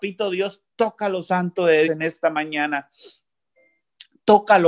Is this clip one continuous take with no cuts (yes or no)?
no